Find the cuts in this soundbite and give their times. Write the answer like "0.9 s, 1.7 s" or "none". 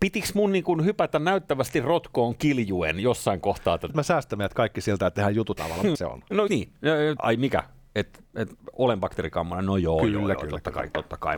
3.9 s, 5.1 s, 5.6 s, 5.9 s, 6.5 s, 7.2 s, 8.3 s